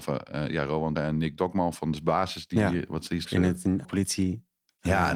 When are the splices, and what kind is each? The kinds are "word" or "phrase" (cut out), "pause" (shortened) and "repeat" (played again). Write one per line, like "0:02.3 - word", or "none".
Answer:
0:01.0 - word
0:03.2 - word
0:03.8 - word